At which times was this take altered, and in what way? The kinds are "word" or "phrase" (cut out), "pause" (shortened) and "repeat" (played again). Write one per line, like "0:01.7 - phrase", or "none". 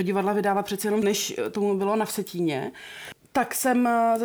0:01.0 - word